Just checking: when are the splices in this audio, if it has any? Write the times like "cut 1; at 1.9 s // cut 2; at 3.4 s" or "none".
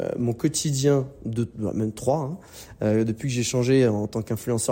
none